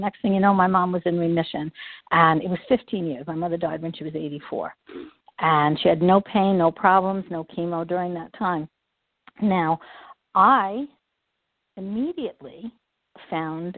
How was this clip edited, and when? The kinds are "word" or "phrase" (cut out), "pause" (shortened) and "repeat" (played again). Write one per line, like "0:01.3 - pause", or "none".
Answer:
none